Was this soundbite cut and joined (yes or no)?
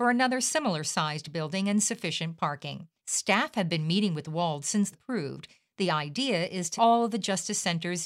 yes